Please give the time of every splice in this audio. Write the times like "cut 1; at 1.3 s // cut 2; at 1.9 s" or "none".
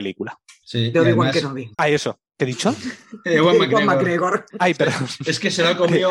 cut 1; at 1.7 s // cut 2; at 4.5 s